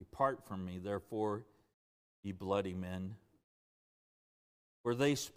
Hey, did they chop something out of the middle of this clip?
no; 0 cuts

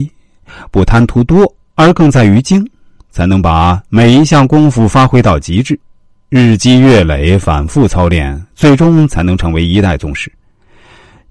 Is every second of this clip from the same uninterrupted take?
yes; 0 cuts

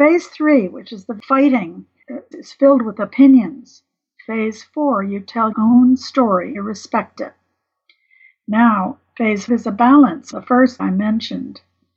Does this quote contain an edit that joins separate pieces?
yes; 6 cuts; at 2.3 s, 5.5 s, 6.5 s, 9.5 s, 10.3 s, 10.8 s

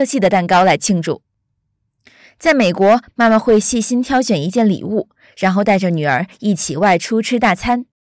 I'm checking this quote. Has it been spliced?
no; 0 cuts

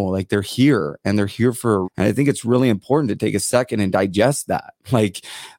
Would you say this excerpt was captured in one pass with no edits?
no; 1 cut; at 1.8 s

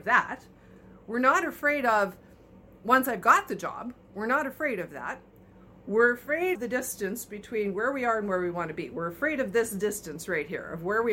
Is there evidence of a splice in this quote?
yes; 1 cut; at 6.5 s

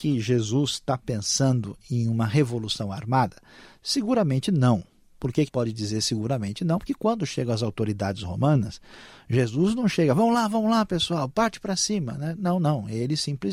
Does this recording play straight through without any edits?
no; 1 cut; at 5.5 s

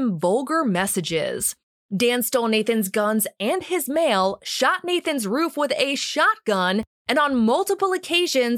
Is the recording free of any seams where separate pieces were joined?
yes; 0 cuts

